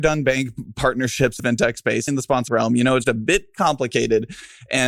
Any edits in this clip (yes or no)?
yes